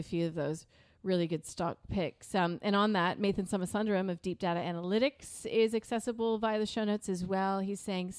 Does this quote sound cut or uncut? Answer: uncut